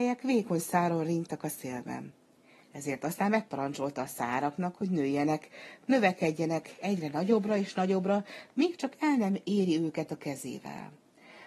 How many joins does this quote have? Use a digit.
0